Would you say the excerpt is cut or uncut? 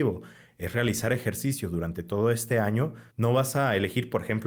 cut